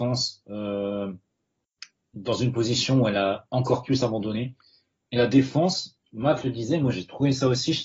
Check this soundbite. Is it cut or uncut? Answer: uncut